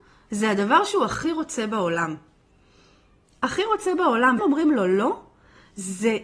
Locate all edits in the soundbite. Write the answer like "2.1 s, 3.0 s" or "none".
4.4 s